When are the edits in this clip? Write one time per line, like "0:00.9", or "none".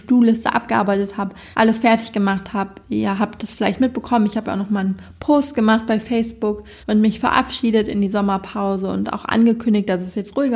0:01.5
0:06.8